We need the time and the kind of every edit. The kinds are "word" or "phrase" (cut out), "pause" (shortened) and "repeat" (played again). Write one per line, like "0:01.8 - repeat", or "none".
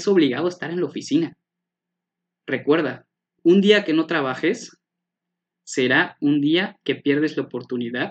0:03.1 - pause